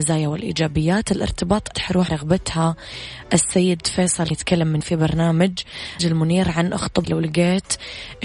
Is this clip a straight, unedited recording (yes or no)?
no